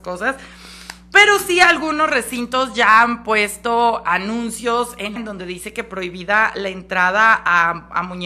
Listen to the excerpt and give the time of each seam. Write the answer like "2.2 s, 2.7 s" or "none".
5.2 s